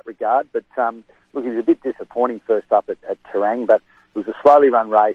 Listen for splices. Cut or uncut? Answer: uncut